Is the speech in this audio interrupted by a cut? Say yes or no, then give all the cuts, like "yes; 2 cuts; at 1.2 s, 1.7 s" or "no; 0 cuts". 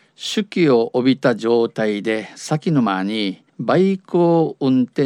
yes; 1 cut; at 3.5 s